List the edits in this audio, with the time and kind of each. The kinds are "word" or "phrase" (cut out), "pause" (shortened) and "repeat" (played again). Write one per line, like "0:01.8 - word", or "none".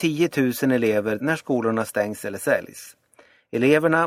0:01.2 - word

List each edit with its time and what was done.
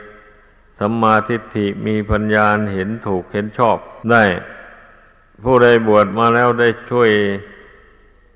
0:04.0 - pause

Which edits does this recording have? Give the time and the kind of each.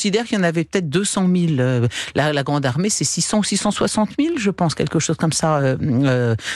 none

